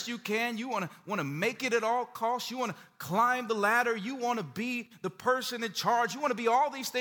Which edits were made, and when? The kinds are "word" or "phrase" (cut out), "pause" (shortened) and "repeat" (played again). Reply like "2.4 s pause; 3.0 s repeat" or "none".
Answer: none